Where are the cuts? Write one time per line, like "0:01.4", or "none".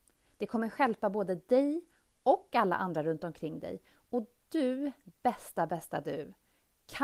none